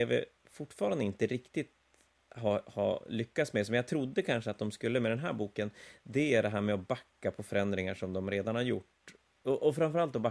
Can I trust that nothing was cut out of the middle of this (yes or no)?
yes